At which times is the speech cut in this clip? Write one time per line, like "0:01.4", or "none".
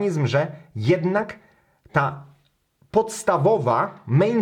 none